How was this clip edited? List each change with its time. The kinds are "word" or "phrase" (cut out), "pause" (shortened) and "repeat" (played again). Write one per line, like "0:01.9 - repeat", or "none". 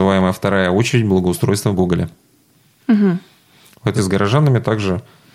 0:01.7 - word
0:04.0 - word